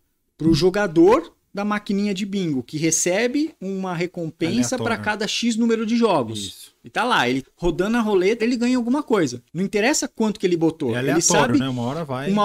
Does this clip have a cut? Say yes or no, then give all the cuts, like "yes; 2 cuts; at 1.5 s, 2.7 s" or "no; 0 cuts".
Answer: yes; 3 cuts; at 7.4 s, 8.4 s, 9.5 s